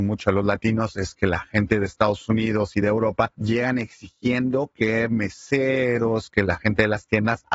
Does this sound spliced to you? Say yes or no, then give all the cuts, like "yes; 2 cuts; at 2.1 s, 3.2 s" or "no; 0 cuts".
no; 0 cuts